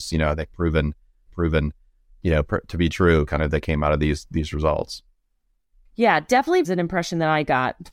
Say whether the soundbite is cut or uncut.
cut